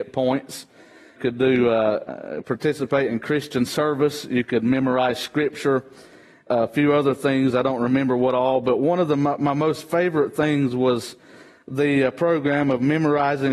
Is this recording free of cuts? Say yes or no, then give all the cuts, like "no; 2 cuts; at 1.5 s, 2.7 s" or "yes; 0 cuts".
yes; 0 cuts